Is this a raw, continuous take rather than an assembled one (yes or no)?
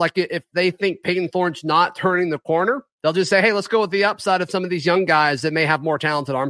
yes